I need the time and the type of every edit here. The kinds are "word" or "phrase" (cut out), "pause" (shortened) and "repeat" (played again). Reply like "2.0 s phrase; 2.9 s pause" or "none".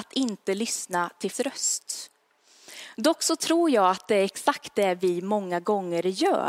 1.3 s word